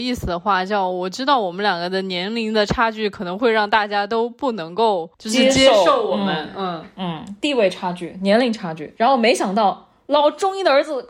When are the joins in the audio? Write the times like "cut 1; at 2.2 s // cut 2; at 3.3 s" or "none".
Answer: cut 1; at 5.1 s